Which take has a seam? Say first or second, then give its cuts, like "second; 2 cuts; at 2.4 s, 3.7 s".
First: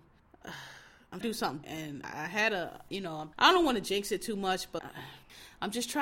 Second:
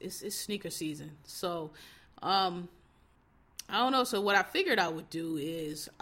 first; 6 cuts; at 1.2 s, 1.6 s, 2.0 s, 2.9 s, 3.3 s, 4.8 s